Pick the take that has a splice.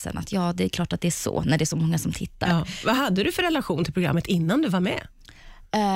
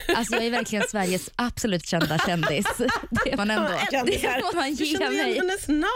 second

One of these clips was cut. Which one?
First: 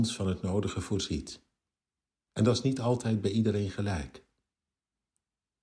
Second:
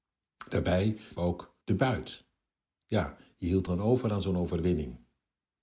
second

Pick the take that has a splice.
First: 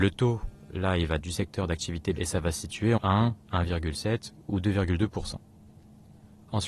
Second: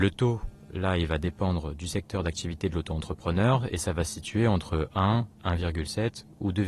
first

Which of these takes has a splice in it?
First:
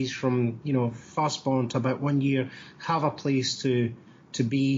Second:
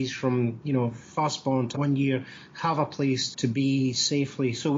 second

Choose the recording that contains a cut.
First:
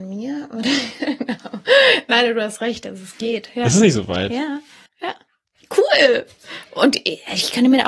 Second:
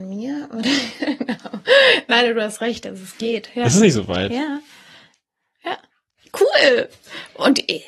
first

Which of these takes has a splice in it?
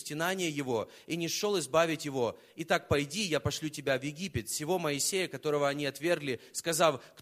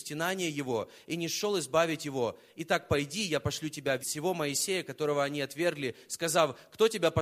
second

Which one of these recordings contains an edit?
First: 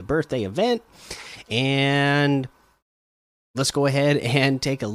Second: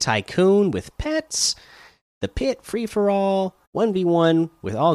second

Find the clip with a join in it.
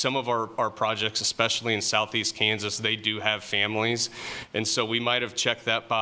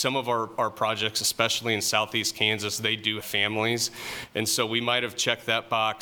second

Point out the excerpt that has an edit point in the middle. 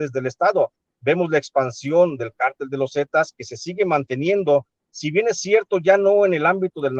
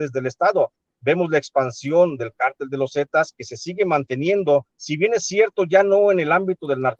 second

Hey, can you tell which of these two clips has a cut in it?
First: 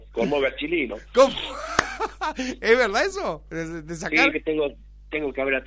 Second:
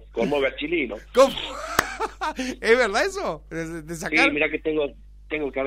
first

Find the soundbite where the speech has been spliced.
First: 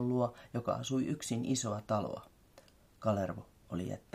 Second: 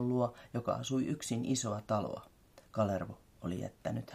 second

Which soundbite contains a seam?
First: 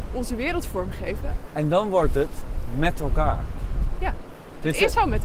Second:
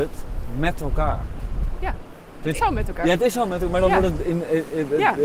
second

